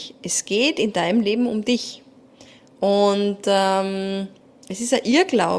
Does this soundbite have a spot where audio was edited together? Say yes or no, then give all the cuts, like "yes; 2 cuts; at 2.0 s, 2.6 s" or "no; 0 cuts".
no; 0 cuts